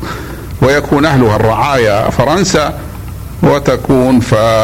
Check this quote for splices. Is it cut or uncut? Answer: cut